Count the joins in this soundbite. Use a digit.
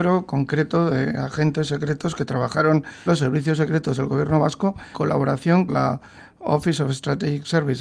3